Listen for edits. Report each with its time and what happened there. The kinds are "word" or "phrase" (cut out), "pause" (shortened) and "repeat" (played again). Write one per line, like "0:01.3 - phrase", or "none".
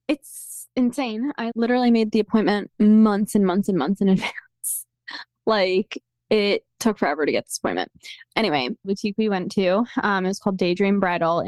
0:01.5 - word
0:02.7 - pause
0:08.8 - phrase